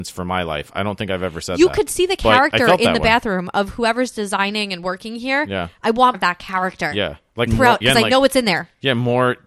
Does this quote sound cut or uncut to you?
cut